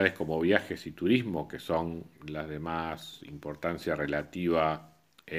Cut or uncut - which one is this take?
uncut